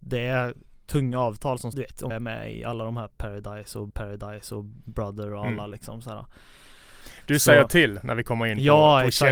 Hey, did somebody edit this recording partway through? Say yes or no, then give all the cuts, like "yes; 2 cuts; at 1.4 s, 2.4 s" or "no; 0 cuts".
yes; 3 cuts; at 1.7 s, 2.1 s, 3.9 s